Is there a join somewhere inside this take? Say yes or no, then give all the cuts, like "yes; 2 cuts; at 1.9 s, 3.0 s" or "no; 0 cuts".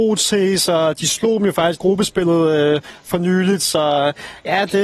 yes; 1 cut; at 1.7 s